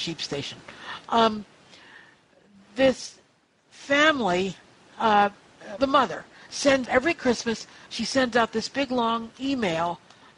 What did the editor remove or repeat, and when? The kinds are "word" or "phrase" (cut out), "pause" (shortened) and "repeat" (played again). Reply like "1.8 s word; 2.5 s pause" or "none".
5.8 s word; 6.8 s word